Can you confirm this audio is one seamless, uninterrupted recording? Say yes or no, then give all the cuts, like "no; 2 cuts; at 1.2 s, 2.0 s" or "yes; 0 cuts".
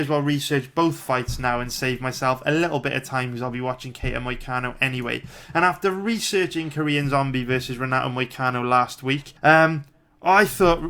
no; 1 cut; at 9.4 s